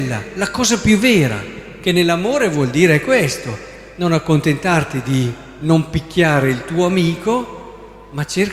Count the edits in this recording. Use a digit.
0